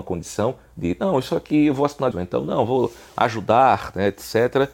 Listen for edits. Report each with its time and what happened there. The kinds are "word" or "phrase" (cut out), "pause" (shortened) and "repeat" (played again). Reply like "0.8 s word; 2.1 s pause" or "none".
2.1 s word